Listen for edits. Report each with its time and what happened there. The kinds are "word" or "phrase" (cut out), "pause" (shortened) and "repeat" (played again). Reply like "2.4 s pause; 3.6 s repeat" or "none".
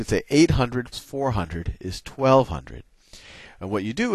0.9 s word